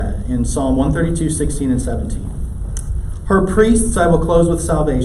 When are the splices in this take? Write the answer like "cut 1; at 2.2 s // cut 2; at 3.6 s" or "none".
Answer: none